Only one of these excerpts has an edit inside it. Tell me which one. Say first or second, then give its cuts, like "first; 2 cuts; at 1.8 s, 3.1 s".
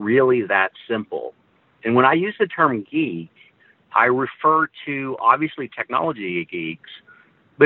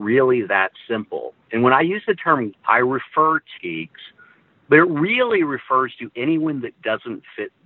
second; 3 cuts; at 1.4 s, 2.5 s, 3.6 s